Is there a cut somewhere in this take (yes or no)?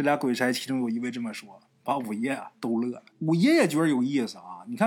yes